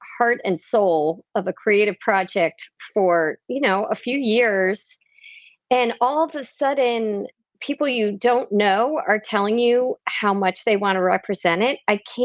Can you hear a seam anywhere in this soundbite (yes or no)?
no